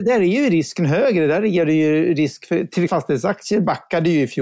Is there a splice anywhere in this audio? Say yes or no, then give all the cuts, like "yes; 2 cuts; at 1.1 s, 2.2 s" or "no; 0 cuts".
yes; 1 cut; at 2.9 s